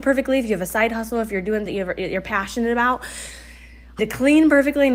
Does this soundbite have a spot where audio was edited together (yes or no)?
yes